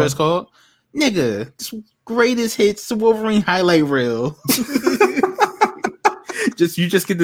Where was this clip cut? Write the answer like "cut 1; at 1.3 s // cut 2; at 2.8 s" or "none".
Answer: none